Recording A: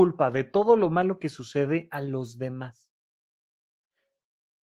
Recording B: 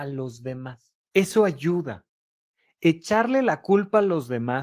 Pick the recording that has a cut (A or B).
B